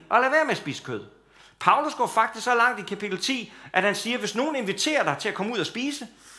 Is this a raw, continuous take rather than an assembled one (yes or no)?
yes